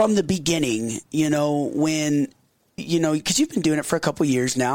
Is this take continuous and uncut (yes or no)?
no